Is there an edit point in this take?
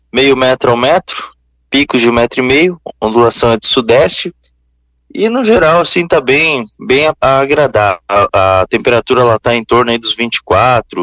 yes; 1 cut; at 8.0 s

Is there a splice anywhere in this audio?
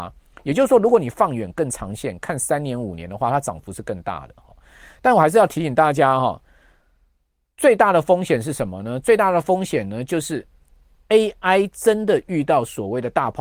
no; 0 cuts

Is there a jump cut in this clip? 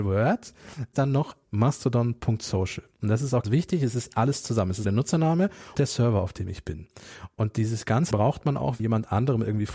yes; 7 cuts; at 0.9 s, 1.4 s, 3.4 s, 4.8 s, 5.7 s, 8.1 s, 8.8 s

